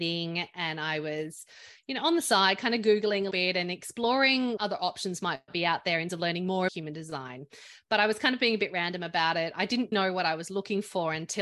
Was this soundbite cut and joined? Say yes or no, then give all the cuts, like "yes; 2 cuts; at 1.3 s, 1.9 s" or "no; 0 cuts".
yes; 5 cuts; at 3.3 s, 4.6 s, 6.1 s, 6.7 s, 9.9 s